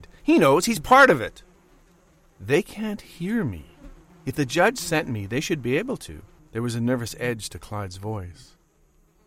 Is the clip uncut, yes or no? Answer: yes